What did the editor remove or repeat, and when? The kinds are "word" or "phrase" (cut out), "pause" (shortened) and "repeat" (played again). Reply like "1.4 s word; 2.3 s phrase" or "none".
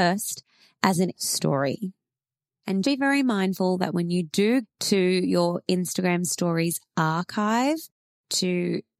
1.1 s word; 2.8 s word; 4.6 s word